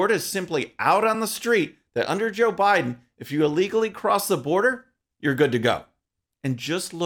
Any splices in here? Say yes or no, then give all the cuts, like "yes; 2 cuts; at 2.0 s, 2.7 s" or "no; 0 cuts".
no; 0 cuts